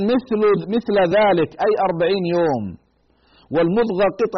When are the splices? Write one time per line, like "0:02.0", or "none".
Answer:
none